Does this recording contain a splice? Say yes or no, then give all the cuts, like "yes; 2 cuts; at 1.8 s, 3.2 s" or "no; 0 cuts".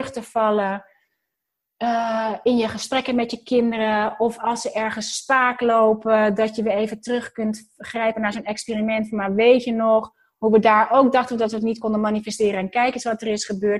no; 0 cuts